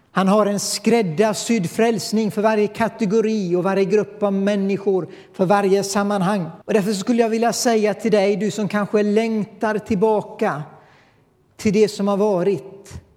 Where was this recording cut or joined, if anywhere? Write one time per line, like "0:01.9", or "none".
0:06.6